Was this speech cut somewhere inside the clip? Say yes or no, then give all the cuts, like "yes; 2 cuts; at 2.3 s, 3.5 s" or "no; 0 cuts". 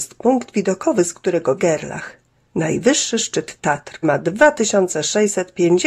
yes; 3 cuts; at 1.6 s, 2.3 s, 4.0 s